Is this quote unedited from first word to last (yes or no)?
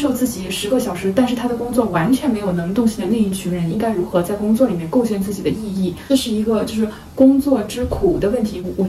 yes